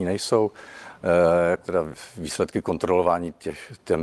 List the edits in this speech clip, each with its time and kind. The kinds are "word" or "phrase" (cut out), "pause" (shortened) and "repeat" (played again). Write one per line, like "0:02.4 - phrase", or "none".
0:01.6 - word